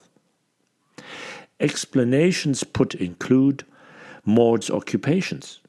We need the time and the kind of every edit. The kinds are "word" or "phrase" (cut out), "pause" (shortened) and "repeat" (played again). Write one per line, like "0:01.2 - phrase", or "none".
0:02.9 - word
0:04.6 - word